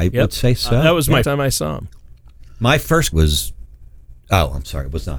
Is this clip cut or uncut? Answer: cut